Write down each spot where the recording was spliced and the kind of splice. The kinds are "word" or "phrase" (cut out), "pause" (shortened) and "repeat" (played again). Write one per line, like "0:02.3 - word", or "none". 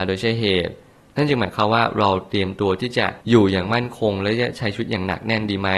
0:03.2 - pause